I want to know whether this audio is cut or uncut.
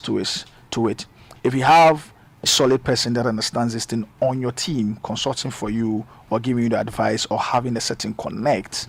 cut